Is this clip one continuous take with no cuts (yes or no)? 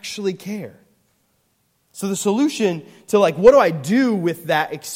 yes